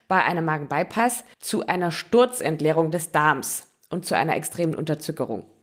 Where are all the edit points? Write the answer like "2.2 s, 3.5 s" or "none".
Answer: 1.3 s